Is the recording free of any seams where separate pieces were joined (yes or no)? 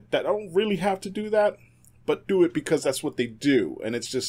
yes